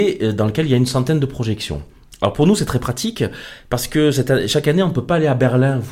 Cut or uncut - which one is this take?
uncut